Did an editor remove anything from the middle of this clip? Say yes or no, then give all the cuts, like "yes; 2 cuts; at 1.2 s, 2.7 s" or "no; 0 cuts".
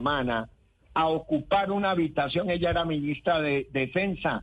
no; 0 cuts